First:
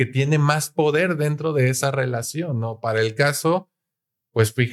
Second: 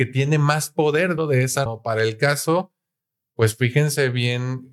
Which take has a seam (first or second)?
second